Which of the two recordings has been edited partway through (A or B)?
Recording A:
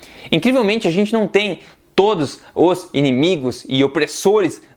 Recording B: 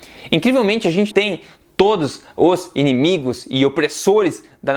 B